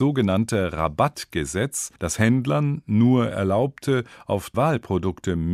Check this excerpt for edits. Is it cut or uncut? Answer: cut